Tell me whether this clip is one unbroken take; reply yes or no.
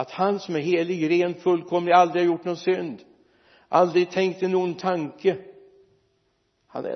yes